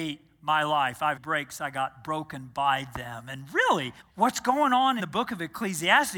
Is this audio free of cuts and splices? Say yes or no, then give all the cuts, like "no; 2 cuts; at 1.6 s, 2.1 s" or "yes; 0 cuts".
no; 3 cuts; at 1.2 s, 4.0 s, 5.0 s